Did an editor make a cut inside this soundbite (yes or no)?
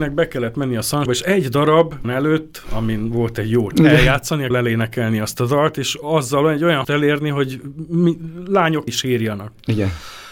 yes